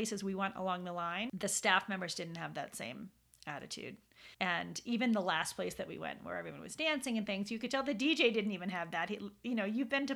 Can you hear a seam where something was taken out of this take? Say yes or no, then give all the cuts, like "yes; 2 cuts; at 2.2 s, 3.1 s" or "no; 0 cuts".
yes; 1 cut; at 4.3 s